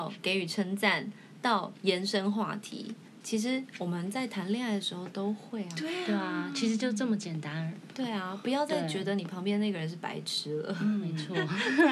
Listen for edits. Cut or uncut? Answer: uncut